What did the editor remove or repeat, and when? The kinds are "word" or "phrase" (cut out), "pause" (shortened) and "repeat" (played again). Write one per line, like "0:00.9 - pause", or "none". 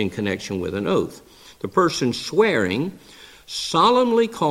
none